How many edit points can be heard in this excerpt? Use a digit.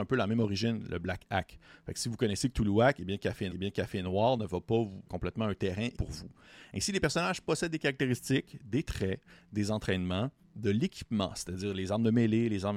3